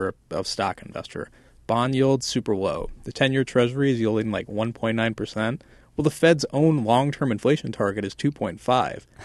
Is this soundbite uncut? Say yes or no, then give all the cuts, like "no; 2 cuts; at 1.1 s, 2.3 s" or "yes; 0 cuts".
yes; 0 cuts